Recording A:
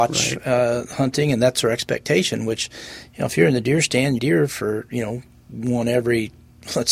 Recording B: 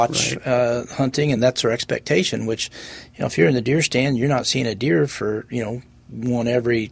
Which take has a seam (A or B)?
A